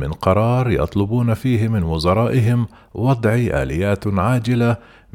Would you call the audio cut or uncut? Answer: uncut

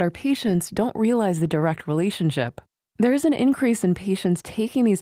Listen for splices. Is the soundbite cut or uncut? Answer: uncut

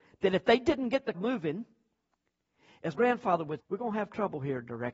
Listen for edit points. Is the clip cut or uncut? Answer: cut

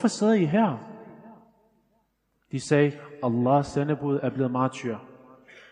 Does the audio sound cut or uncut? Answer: uncut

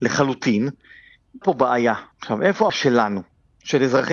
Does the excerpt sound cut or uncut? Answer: cut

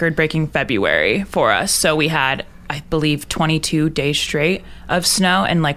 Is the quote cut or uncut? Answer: uncut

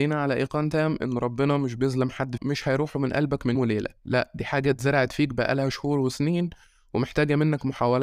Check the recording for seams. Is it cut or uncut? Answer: cut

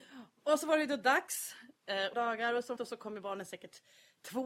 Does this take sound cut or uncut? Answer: cut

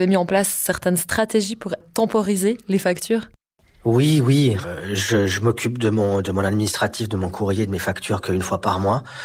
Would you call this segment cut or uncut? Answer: uncut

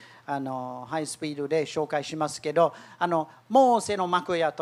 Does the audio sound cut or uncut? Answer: uncut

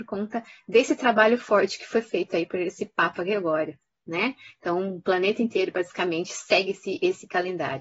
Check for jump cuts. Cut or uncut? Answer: uncut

